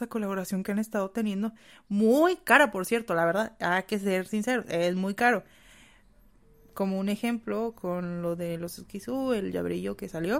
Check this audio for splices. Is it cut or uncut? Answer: uncut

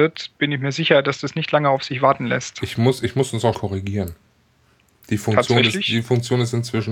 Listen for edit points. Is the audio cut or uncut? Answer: cut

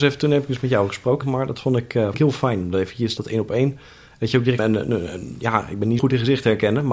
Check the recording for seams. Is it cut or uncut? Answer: cut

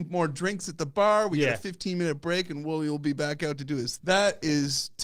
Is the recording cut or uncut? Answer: cut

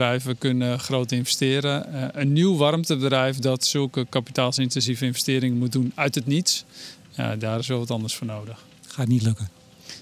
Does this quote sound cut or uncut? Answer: cut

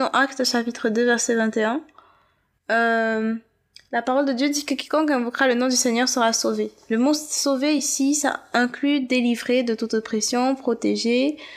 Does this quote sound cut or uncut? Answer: uncut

